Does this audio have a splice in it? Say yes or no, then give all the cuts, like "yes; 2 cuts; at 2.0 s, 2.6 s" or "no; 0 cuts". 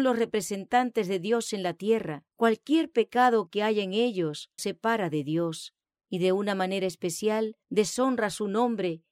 yes; 3 cuts; at 2.3 s, 4.6 s, 7.6 s